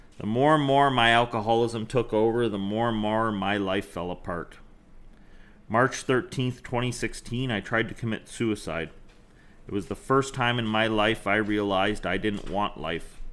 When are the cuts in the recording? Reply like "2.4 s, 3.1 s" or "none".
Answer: none